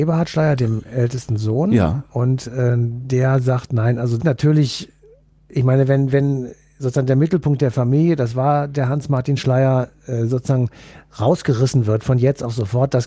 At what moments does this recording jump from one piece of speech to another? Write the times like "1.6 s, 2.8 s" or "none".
4.2 s